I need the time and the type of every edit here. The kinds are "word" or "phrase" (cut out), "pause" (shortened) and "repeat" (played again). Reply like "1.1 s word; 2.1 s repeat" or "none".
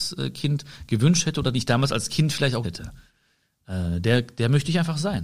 1.5 s phrase; 2.6 s word